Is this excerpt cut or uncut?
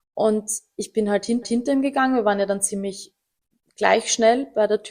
cut